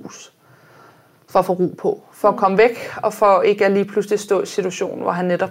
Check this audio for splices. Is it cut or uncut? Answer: uncut